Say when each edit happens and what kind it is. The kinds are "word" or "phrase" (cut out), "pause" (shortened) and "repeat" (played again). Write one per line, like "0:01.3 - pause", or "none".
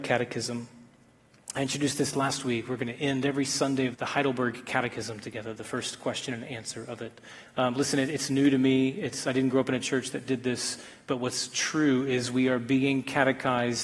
0:03.9 - phrase